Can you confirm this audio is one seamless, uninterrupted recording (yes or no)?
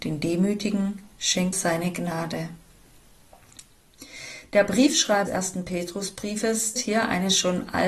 no